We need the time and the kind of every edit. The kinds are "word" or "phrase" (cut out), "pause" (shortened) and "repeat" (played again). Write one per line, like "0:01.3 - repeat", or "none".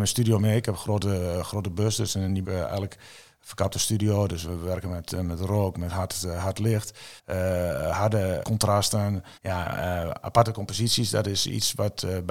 0:02.4 - phrase
0:07.2 - pause
0:08.4 - word
0:09.4 - pause